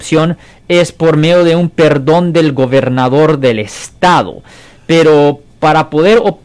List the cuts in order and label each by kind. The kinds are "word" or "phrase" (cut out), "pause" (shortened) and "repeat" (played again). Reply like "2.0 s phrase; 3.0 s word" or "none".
none